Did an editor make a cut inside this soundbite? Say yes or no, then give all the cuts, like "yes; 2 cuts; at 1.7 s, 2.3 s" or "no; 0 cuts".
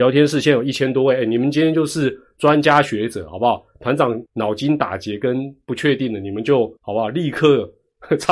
yes; 2 cuts; at 4.3 s, 6.8 s